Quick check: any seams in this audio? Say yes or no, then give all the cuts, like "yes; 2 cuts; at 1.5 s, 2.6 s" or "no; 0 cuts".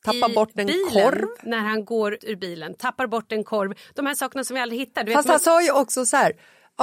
yes; 1 cut; at 2.2 s